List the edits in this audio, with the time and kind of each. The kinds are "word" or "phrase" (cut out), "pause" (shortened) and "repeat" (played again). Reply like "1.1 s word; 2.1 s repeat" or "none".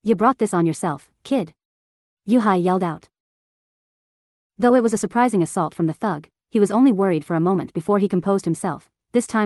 none